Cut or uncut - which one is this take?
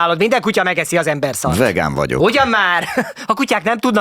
uncut